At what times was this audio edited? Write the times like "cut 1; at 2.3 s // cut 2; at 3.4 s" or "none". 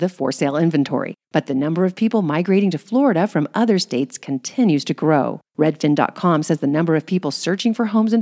cut 1; at 1.2 s // cut 2; at 5.5 s